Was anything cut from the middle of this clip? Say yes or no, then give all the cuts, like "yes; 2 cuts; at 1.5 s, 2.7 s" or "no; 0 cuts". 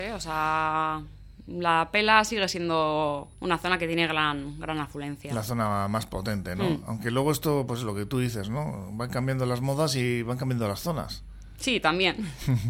yes; 1 cut; at 3.3 s